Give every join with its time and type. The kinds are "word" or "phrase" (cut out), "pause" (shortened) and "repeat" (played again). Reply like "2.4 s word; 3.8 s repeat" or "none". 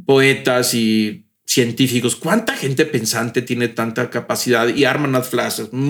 none

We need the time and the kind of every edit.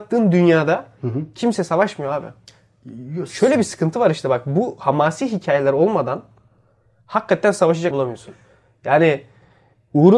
7.9 s word

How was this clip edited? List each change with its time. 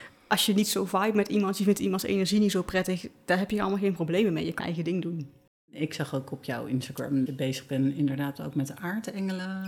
4.6 s phrase; 5.6 s pause; 7.3 s word

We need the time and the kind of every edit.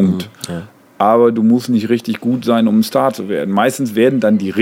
none

